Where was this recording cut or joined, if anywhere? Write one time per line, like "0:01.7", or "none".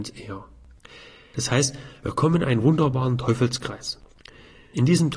none